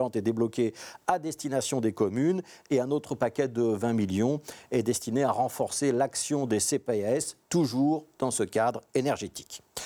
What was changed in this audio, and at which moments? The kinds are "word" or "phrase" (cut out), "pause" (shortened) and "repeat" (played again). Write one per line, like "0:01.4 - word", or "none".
0:07.4 - pause